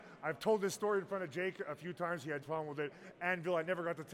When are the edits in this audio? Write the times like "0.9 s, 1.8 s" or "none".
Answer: 2.4 s